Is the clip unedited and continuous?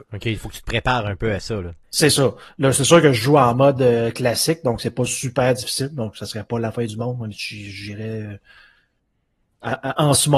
no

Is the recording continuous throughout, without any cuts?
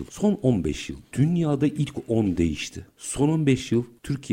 yes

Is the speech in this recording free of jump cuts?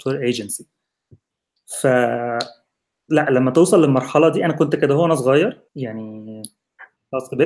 no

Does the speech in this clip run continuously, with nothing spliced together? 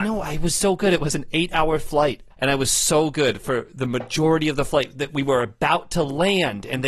no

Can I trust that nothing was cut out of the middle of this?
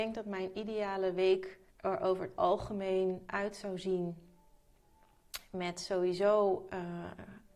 no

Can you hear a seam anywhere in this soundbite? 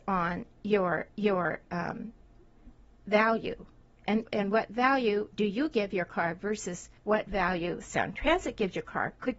yes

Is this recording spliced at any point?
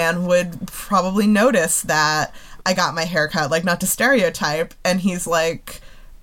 no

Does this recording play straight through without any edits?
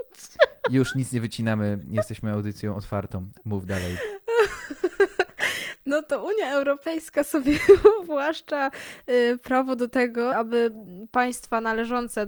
no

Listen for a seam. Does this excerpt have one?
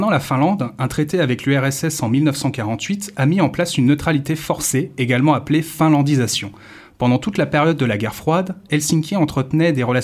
no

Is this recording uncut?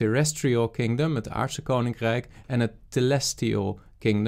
yes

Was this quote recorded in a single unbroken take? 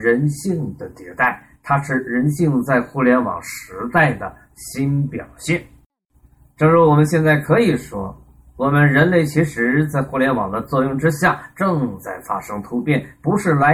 yes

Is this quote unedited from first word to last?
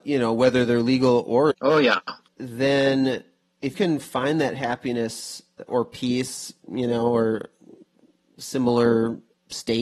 no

